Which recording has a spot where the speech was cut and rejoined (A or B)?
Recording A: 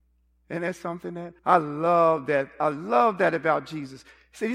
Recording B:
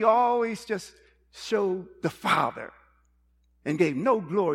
A